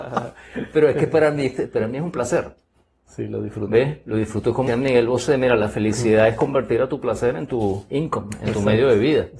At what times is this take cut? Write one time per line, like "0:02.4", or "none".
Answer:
0:04.7